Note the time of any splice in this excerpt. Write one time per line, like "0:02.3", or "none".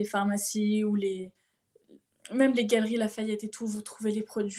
none